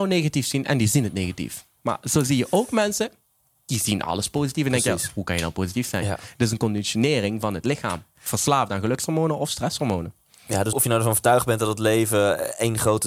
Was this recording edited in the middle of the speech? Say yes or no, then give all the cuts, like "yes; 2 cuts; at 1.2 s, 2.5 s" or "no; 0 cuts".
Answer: yes; 1 cut; at 10.7 s